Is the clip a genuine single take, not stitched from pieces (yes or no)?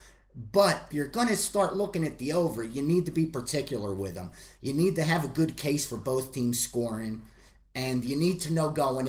no